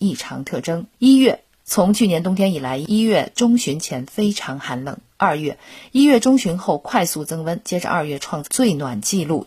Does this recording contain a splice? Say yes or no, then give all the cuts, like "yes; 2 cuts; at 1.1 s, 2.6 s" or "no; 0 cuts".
yes; 1 cut; at 0.9 s